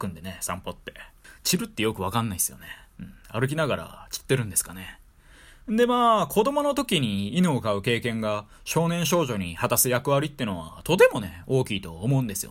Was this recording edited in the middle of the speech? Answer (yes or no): no